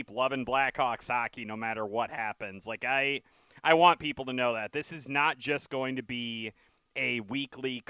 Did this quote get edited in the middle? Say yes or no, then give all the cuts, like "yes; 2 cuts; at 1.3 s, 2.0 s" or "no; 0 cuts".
no; 0 cuts